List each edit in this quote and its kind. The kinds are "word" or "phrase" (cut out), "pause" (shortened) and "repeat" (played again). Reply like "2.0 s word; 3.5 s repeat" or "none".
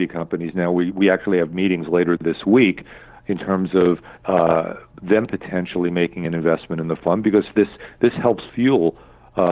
4.2 s pause